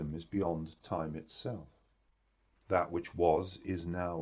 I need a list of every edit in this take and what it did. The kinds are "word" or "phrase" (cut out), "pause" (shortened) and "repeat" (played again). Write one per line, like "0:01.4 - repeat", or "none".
none